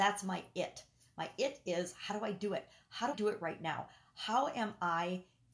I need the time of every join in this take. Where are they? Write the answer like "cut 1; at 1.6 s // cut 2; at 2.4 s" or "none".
cut 1; at 3.1 s